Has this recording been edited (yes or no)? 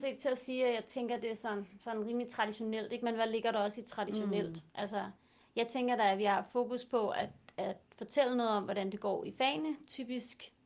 no